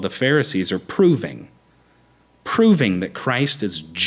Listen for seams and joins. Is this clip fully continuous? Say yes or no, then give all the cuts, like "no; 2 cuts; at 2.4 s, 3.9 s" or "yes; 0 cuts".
yes; 0 cuts